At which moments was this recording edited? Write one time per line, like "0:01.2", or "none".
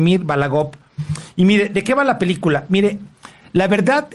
none